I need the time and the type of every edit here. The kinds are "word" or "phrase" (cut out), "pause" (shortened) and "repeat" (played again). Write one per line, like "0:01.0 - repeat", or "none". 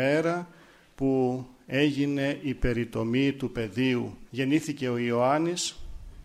0:04.3 - pause